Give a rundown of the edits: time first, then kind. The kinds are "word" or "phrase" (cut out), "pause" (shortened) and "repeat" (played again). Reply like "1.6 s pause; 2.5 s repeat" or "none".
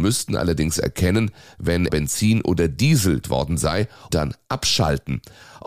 1.9 s word; 3.2 s word; 4.1 s word